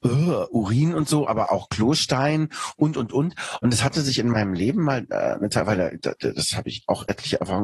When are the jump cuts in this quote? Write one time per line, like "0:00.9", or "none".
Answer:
0:01.5